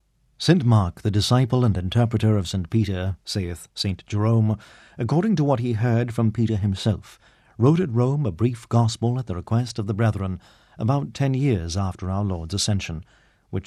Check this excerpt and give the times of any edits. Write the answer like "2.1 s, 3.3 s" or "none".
none